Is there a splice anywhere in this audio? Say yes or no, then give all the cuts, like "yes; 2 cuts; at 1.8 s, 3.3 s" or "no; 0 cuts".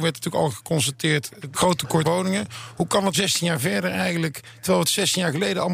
yes; 3 cuts; at 1.5 s, 2.0 s, 3.1 s